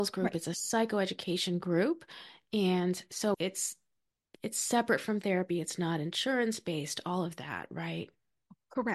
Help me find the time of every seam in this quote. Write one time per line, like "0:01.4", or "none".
0:03.3